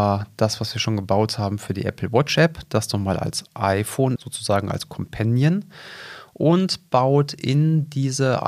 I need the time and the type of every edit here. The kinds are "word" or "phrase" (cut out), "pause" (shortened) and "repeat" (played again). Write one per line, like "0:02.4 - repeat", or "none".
0:04.2 - word

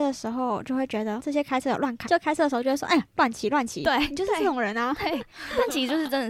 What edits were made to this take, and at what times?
0:01.2 - word
0:02.1 - word

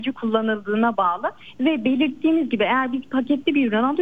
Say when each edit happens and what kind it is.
none

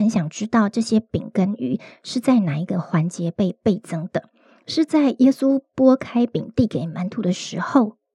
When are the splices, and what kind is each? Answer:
none

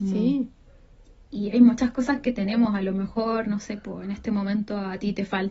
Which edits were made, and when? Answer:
none

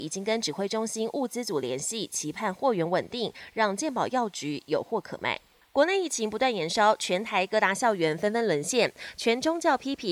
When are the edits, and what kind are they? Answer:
none

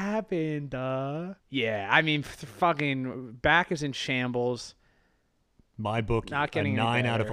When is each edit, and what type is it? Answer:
0:01.4 - pause

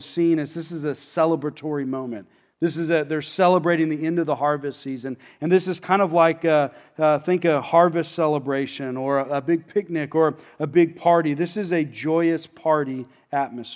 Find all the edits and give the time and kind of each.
none

